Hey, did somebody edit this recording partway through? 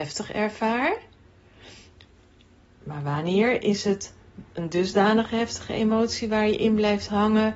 no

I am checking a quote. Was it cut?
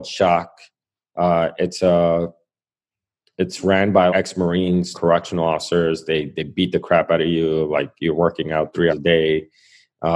yes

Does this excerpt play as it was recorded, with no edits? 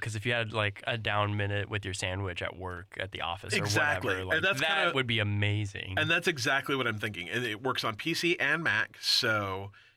yes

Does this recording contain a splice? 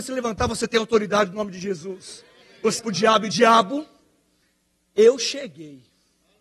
yes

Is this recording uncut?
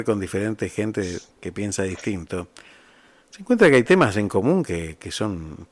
yes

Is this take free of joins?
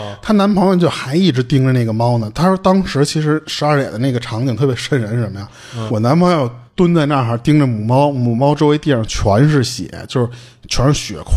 no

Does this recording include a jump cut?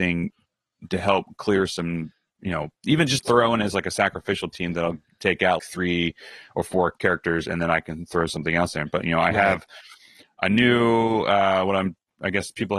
yes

